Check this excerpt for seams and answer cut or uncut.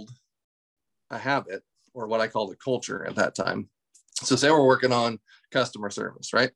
uncut